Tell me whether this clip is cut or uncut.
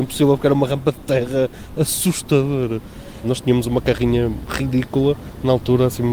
uncut